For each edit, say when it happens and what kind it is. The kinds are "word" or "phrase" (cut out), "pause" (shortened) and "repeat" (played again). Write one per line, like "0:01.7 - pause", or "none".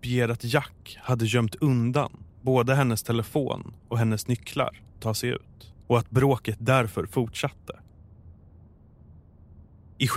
0:05.0 - phrase
0:05.8 - pause